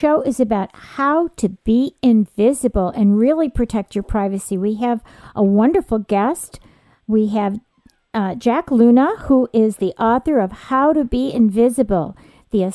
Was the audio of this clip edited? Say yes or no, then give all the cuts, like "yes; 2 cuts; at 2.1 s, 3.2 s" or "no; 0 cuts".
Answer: no; 0 cuts